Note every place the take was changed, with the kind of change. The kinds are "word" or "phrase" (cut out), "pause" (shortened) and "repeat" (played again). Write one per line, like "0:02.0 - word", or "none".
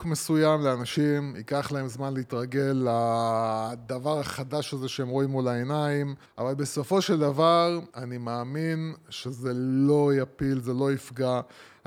0:06.3 - pause
0:07.9 - pause